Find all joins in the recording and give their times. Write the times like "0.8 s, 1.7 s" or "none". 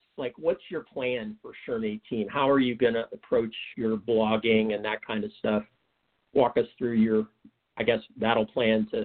3.7 s